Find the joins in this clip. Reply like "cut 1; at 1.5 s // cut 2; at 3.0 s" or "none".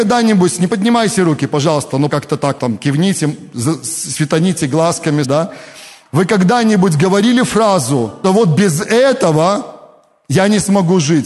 cut 1; at 2.1 s // cut 2; at 2.6 s // cut 3; at 5.2 s // cut 4; at 8.2 s